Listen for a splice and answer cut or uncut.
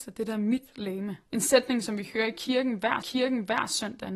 cut